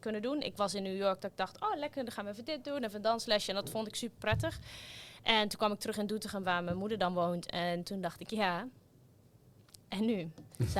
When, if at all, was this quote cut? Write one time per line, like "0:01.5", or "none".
none